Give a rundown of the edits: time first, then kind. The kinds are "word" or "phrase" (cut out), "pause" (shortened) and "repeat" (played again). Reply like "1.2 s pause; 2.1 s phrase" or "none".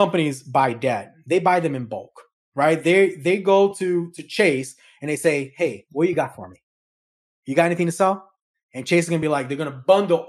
none

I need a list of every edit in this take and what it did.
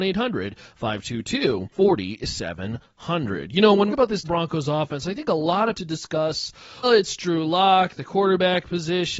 1.7 s pause; 3.9 s phrase; 4.2 s word; 5.7 s phrase; 6.8 s word

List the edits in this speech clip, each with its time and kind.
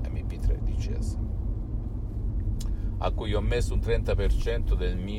none

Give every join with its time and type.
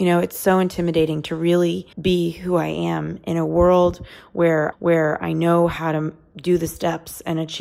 1.9 s pause; 4.7 s repeat

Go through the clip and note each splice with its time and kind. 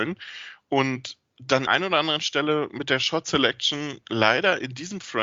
1.7 s phrase

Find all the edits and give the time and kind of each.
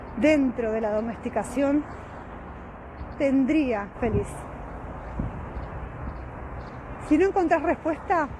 3.1 s phrase; 3.9 s phrase

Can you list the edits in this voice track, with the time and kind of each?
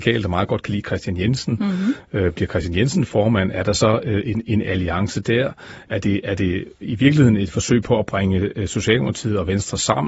none

